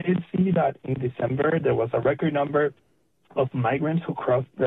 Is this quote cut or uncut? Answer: uncut